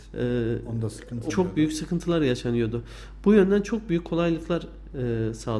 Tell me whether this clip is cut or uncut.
cut